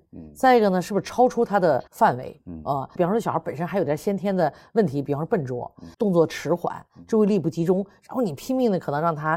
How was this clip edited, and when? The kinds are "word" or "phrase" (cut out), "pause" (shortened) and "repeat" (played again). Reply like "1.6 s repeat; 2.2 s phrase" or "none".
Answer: 1.9 s pause; 5.9 s pause